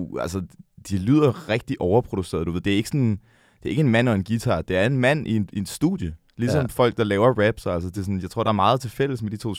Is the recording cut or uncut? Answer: uncut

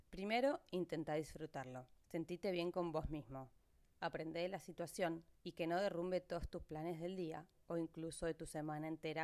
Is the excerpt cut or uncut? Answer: cut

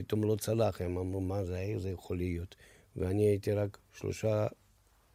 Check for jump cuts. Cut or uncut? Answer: uncut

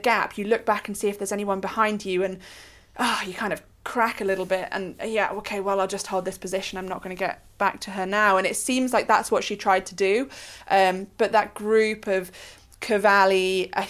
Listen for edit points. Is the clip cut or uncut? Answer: uncut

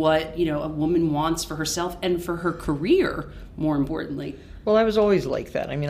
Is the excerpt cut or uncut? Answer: uncut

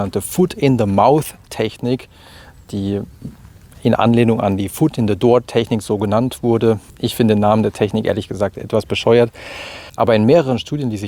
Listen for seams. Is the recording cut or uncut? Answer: uncut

